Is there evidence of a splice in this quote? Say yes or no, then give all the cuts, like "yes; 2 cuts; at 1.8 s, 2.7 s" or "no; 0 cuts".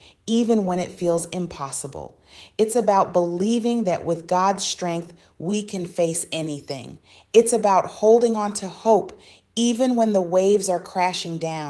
no; 0 cuts